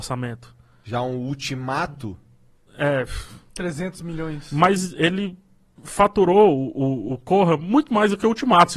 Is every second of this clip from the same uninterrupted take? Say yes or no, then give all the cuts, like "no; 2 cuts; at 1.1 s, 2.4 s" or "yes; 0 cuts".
yes; 0 cuts